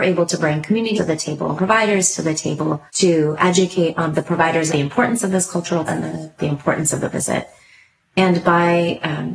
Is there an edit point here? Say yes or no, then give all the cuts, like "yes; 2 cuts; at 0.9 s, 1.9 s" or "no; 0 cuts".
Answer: yes; 8 cuts; at 1.0 s, 1.6 s, 2.9 s, 4.1 s, 4.7 s, 5.9 s, 6.4 s, 7.1 s